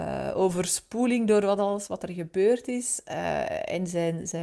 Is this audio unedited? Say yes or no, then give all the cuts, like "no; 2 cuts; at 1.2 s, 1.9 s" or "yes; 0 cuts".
yes; 0 cuts